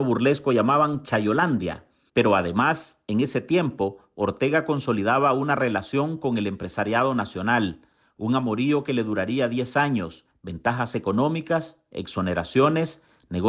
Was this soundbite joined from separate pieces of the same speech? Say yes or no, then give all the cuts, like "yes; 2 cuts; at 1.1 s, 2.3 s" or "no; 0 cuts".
yes; 1 cut; at 10.3 s